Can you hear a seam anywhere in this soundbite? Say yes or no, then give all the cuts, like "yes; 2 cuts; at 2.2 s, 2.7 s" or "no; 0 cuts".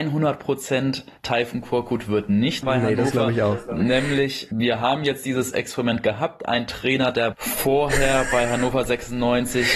yes; 4 cuts; at 1.2 s, 2.6 s, 4.5 s, 7.3 s